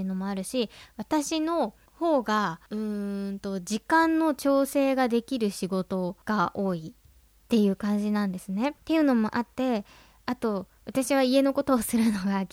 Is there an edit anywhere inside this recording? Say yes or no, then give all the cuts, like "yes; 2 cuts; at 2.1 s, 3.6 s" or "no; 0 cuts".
yes; 4 cuts; at 1.9 s, 2.7 s, 6.2 s, 8.8 s